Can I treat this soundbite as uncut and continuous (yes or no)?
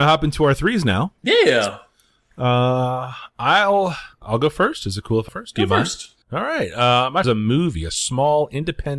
no